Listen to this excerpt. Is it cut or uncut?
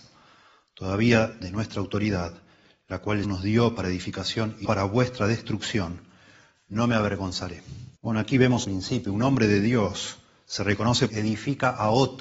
cut